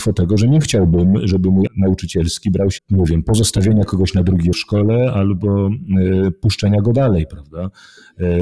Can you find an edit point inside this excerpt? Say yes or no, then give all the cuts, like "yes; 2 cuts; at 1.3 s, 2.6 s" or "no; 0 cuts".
yes; 3 cuts; at 1.7 s, 2.8 s, 4.5 s